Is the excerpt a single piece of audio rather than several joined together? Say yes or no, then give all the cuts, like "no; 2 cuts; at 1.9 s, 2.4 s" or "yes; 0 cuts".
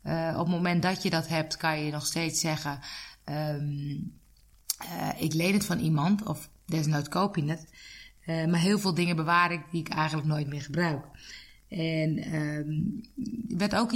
yes; 0 cuts